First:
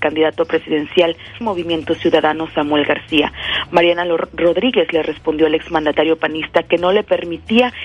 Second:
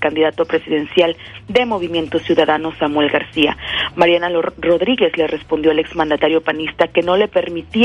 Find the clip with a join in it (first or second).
first